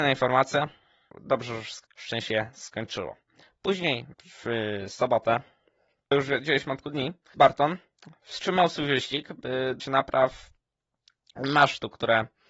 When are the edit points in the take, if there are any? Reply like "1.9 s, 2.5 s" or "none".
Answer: 1.8 s, 4.1 s, 6.1 s, 6.8 s, 7.3 s, 9.8 s